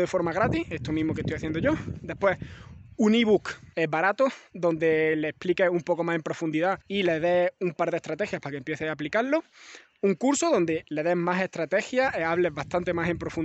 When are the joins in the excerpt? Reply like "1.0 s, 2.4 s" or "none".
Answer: 3.7 s, 6.8 s